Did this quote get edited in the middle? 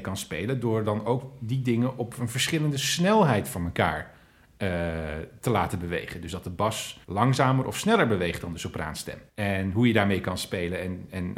yes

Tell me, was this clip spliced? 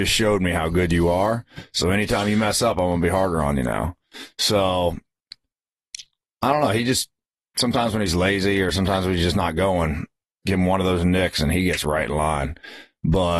no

